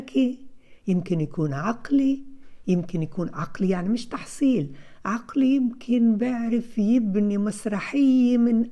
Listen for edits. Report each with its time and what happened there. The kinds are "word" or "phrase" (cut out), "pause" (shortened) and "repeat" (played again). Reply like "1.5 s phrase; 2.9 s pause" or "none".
none